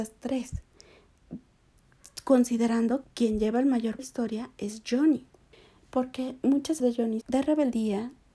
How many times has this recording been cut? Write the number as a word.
five